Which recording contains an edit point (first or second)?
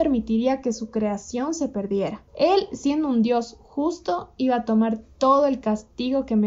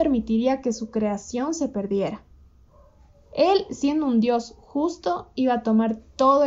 first